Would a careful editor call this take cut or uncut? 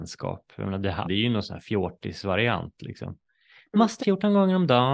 cut